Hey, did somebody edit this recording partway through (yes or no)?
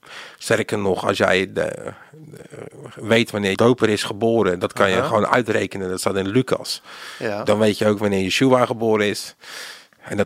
yes